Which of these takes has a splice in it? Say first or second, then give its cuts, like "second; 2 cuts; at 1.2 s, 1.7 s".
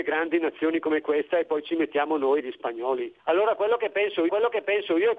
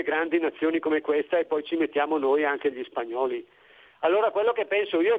first; 3 cuts; at 2.4 s, 3.2 s, 4.3 s